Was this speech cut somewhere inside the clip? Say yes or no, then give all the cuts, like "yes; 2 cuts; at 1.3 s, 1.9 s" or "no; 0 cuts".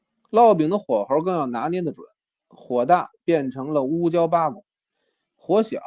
no; 0 cuts